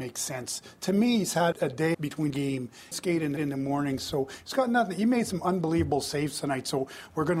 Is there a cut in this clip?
yes; 5 cuts; at 1.5 s, 1.9 s, 2.3 s, 2.9 s, 3.4 s

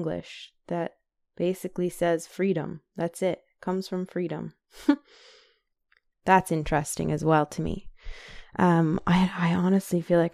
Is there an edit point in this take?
no; 0 cuts

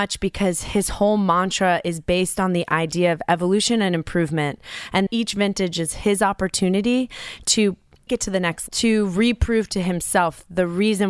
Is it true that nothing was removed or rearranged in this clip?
no; 3 cuts; at 5.1 s, 8.1 s, 8.7 s

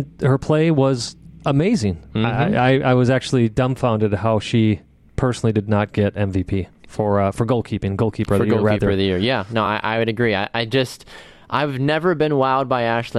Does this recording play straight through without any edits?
yes; 0 cuts

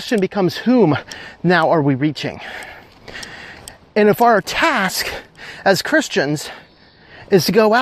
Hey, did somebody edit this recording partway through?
no; 0 cuts

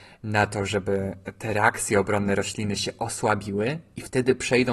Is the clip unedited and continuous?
yes; 0 cuts

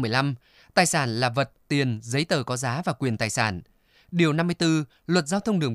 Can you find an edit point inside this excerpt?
no; 0 cuts

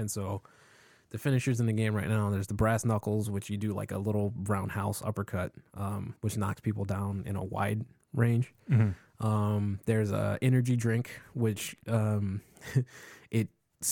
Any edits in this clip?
yes; 1 cut; at 6.2 s

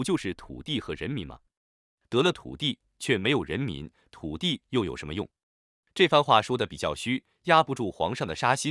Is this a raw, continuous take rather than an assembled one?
yes; 0 cuts

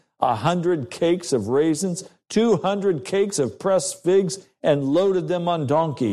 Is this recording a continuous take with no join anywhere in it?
yes; 0 cuts

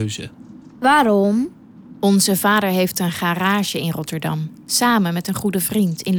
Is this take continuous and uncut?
no; 1 cut; at 4.6 s

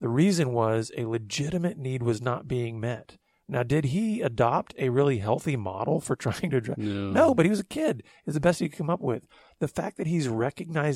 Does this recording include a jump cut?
no; 0 cuts

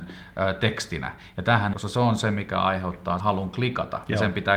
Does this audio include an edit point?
yes; 2 cuts; at 1.7 s, 3.2 s

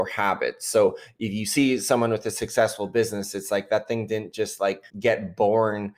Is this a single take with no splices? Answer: no; 1 cut; at 4.9 s

